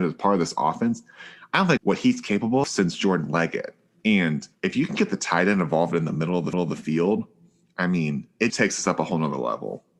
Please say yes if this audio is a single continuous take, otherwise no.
no